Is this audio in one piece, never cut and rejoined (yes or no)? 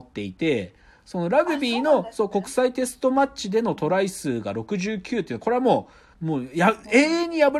no